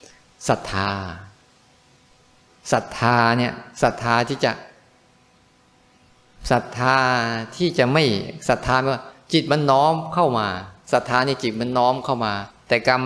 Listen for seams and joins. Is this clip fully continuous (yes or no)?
yes